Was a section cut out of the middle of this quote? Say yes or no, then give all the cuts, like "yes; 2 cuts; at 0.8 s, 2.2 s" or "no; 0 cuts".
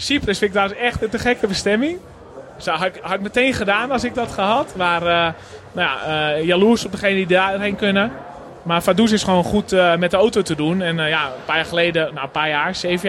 yes; 1 cut; at 4.1 s